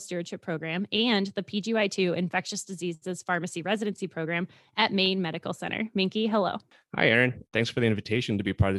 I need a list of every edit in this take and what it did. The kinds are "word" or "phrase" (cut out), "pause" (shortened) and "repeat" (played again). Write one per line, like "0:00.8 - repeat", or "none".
none